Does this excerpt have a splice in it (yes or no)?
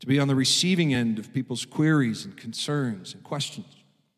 no